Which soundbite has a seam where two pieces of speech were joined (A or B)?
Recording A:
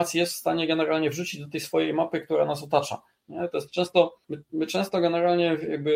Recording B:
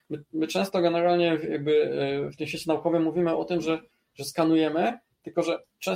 A